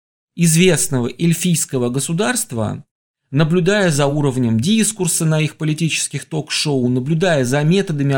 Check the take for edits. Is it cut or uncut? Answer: uncut